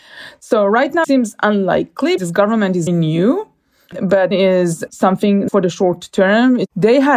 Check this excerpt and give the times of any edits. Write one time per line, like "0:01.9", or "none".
0:01.0
0:02.2
0:02.9
0:04.3
0:05.5